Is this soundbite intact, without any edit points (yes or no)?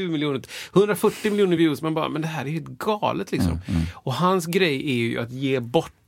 yes